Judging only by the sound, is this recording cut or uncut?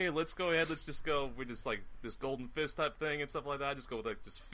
uncut